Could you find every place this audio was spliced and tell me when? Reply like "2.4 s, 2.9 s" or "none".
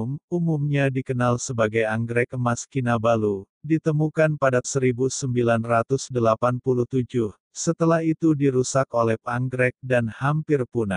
4.6 s, 9.2 s